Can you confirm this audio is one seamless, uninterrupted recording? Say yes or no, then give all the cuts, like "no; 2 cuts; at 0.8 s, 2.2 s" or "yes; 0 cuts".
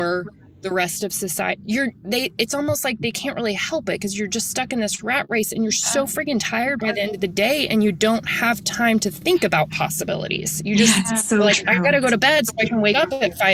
no; 1 cut; at 1.6 s